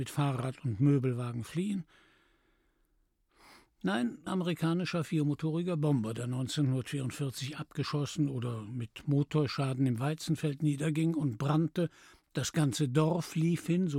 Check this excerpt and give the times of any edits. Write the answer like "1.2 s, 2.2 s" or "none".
4.3 s